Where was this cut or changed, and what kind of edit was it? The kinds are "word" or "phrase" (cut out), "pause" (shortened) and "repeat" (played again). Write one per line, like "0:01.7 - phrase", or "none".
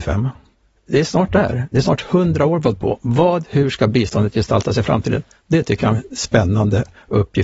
none